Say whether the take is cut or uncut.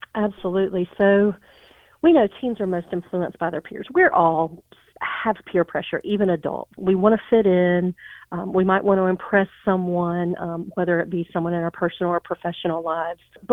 uncut